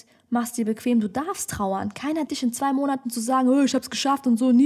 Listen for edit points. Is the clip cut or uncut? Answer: cut